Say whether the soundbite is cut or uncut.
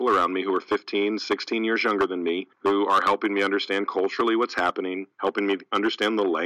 cut